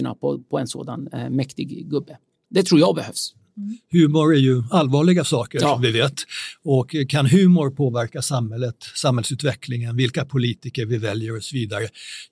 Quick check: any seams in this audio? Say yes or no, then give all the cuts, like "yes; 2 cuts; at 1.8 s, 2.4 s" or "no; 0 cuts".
no; 0 cuts